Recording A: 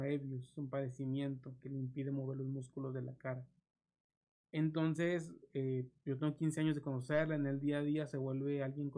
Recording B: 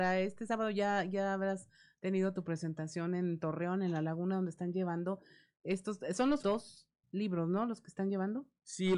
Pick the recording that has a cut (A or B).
B